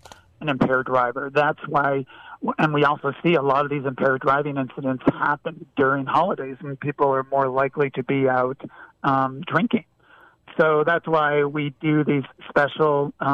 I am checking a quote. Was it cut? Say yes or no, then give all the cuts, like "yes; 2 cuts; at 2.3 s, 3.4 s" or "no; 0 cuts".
no; 0 cuts